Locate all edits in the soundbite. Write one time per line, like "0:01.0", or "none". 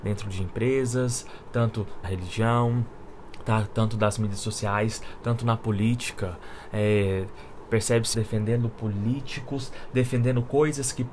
0:02.0
0:08.1